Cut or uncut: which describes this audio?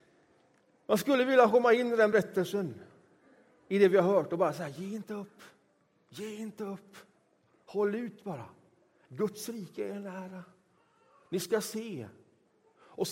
uncut